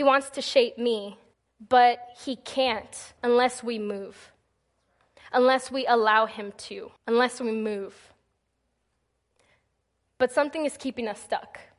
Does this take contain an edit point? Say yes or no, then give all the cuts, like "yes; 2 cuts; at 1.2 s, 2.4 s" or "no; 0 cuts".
yes; 3 cuts; at 1.3 s, 3.2 s, 7.0 s